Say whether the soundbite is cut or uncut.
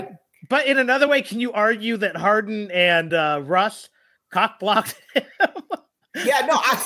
uncut